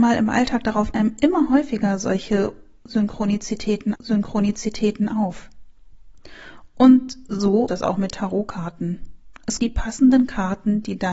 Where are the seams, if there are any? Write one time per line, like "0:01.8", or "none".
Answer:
0:00.9
0:04.0
0:07.7
0:08.1
0:09.6